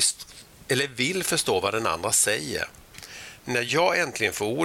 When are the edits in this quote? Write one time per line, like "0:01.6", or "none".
none